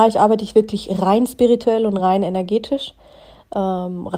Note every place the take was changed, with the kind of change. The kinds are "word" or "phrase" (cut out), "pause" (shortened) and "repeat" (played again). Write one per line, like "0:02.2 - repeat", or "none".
none